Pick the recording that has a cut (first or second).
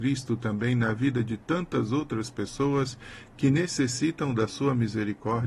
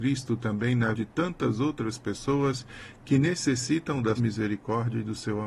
second